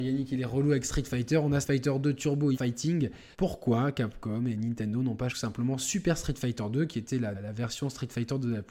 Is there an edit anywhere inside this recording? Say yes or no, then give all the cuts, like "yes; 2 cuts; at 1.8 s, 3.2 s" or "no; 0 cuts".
yes; 5 cuts; at 1.6 s, 2.5 s, 3.3 s, 5.3 s, 7.3 s